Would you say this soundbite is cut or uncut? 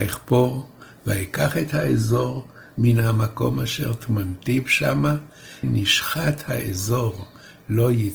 cut